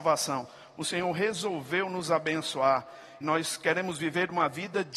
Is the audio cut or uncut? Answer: cut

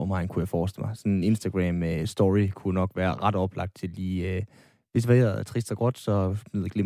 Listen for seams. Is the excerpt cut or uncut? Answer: uncut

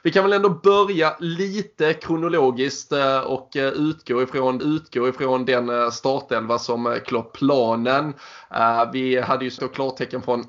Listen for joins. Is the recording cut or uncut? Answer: cut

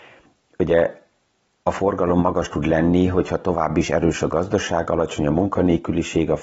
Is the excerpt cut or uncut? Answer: uncut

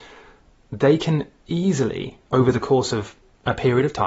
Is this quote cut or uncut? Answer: uncut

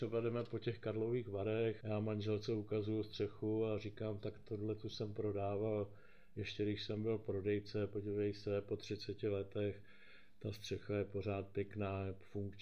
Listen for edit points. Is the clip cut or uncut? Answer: cut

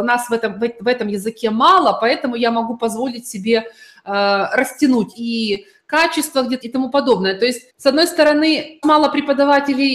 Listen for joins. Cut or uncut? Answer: cut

